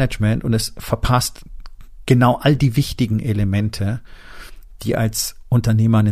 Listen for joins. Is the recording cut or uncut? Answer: uncut